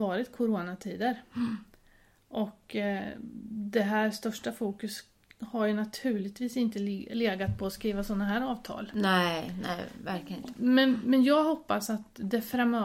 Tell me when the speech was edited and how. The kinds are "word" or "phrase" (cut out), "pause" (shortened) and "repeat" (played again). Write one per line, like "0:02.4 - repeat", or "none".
none

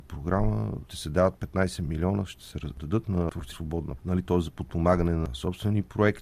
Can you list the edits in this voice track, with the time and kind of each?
0:03.5 - word
0:04.0 - word

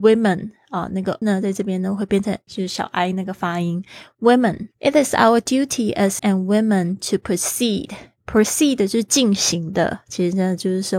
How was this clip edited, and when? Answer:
0:01.2 - word
0:02.5 - phrase
0:04.7 - pause
0:06.2 - word

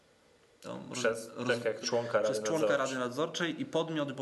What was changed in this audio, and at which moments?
0:01.8 - word

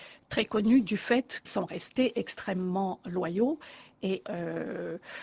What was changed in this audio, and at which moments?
0:01.5 - word
0:04.2 - word

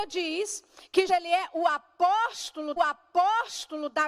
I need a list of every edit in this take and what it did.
0:01.1 - word
0:02.8 - repeat

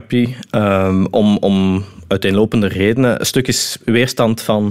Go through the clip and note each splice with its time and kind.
none

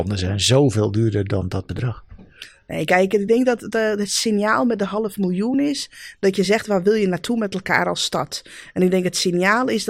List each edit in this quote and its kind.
none

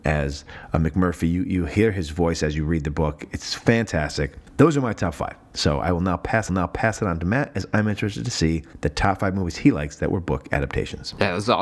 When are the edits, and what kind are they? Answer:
0:06.5 - repeat

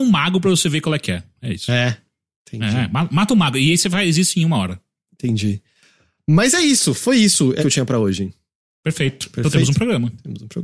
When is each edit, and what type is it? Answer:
0:07.6 - word

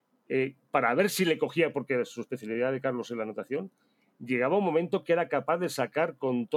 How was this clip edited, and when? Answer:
none

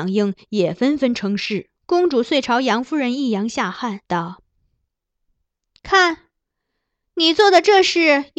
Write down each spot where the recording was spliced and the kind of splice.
0:01.8 - pause
0:04.0 - pause

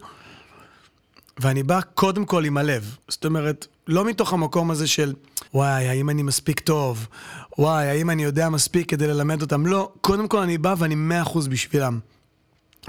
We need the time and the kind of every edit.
0:03.0 - pause
0:05.5 - pause

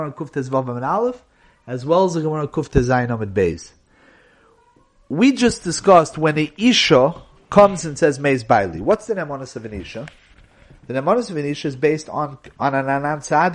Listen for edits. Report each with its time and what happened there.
none

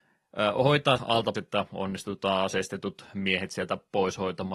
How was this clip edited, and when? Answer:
0:01.0 - word
0:01.3 - word

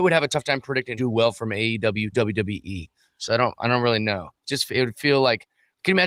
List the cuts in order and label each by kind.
0:01.0 - phrase
0:02.1 - word
0:04.4 - pause

